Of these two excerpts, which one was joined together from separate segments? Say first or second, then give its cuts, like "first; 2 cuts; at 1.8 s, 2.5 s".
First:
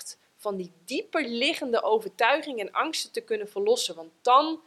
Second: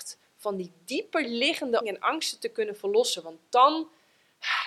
second; 1 cut; at 1.8 s